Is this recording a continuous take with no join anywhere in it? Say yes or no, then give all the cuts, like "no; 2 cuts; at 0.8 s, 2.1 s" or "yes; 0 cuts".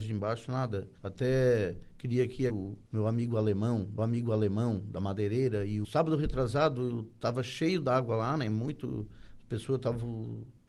no; 5 cuts; at 1.0 s, 2.5 s, 2.9 s, 4.0 s, 5.8 s